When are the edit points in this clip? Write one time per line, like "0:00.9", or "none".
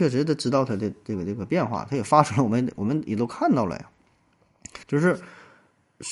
0:04.8

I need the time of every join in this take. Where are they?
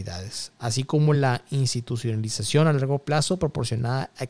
none

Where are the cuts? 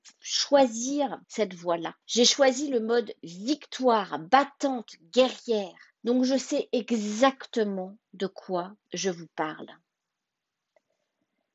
0:01.2
0:02.0
0:06.0

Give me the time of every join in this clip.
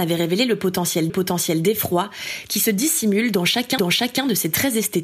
0:01.1
0:03.8

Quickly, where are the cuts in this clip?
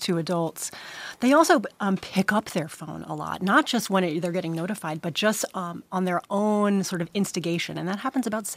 none

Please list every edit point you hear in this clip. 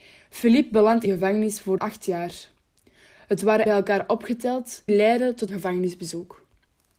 0:01.1
0:01.8
0:03.7
0:04.9
0:05.5

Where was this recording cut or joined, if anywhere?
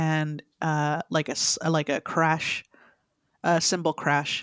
none

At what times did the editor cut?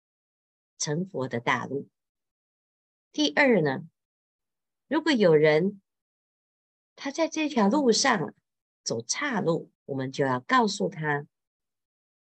0:09.7

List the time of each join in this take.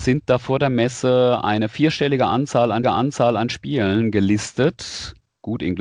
0:02.8

